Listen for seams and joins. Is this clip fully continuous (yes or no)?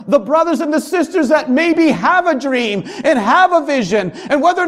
yes